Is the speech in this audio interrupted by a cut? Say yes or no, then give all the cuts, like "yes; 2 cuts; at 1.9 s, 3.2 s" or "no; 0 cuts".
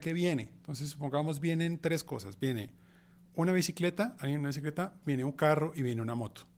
no; 0 cuts